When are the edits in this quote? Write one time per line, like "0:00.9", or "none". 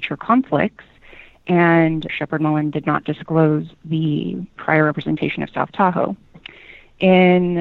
0:02.1